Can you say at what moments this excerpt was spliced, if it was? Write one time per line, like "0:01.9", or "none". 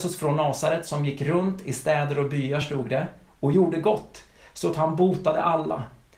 none